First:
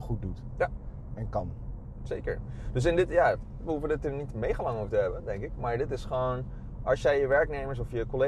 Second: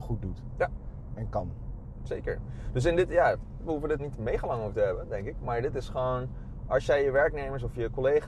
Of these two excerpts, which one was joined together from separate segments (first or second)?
second